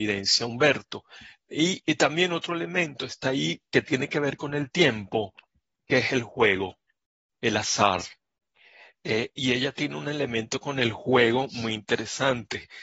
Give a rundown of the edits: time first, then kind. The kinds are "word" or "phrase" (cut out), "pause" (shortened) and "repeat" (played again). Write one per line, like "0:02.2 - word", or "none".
none